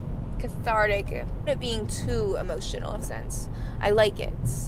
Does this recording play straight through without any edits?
no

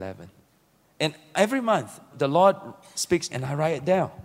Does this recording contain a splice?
yes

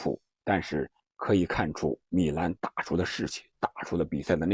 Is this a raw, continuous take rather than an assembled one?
no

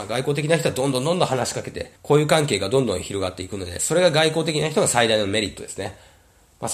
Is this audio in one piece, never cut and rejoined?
no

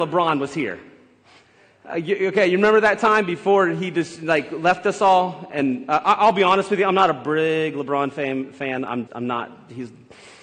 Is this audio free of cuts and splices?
no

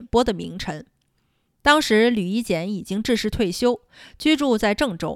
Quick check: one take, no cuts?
yes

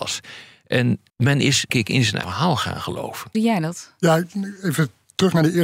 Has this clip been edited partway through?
yes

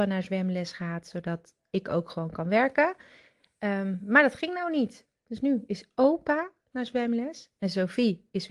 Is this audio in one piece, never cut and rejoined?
yes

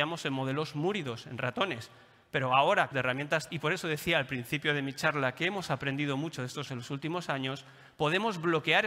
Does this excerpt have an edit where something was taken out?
yes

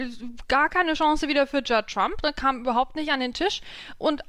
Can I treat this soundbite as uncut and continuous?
yes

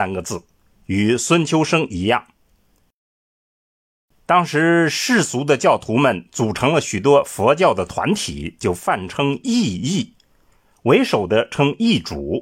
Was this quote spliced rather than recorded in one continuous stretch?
no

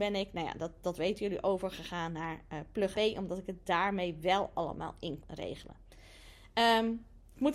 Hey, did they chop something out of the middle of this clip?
yes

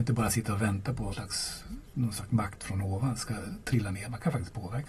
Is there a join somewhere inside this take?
yes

